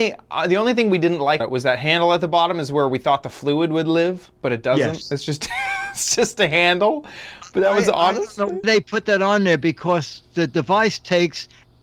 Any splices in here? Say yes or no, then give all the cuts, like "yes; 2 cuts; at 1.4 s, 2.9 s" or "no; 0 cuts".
yes; 3 cuts; at 1.4 s, 4.4 s, 8.6 s